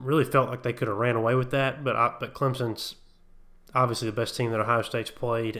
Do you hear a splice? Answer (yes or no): no